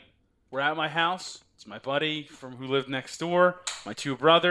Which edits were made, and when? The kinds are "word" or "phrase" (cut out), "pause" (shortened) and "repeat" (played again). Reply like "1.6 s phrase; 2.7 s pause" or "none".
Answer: none